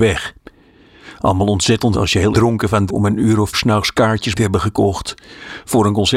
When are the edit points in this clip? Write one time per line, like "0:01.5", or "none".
0:01.9
0:02.3
0:02.9
0:03.5
0:04.3